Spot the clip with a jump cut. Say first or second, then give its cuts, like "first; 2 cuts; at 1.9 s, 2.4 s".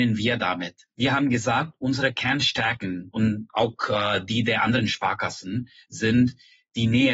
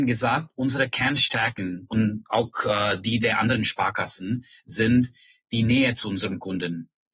first; 1 cut; at 0.9 s